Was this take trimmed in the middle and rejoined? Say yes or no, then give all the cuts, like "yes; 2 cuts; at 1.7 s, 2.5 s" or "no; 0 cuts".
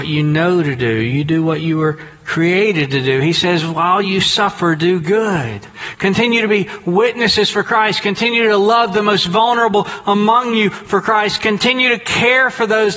no; 0 cuts